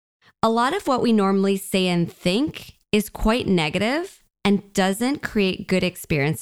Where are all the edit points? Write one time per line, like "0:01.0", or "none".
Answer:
none